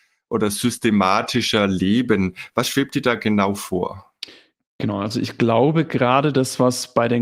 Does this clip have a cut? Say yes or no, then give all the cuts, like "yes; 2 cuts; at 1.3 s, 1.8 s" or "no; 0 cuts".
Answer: no; 0 cuts